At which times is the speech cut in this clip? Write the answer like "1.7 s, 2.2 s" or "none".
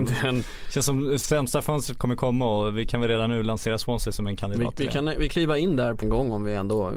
5.3 s, 6.0 s